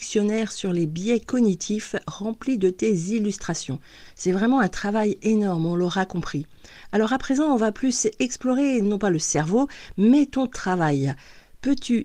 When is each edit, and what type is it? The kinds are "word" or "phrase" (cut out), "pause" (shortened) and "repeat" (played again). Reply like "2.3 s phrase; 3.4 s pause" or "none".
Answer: none